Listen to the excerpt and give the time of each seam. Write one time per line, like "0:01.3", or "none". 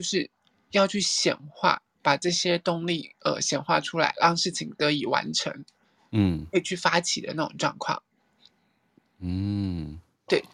none